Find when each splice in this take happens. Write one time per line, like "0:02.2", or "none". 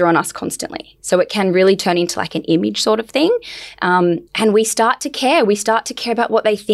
0:04.3